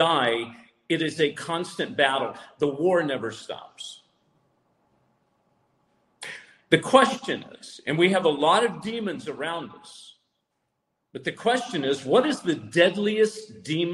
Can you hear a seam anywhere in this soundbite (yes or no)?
no